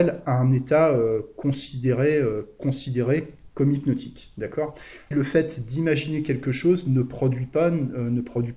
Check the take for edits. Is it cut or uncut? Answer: cut